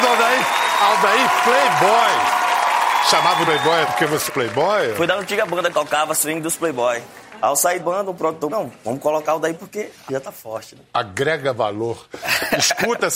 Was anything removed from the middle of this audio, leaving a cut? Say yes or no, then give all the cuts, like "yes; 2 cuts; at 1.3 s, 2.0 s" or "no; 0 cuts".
yes; 8 cuts; at 3.5 s, 3.8 s, 4.3 s, 5.7 s, 7.8 s, 8.5 s, 9.6 s, 10.1 s